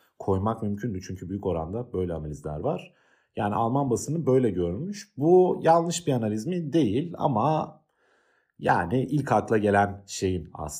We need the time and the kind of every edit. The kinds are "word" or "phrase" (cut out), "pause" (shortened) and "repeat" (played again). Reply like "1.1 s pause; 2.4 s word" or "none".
none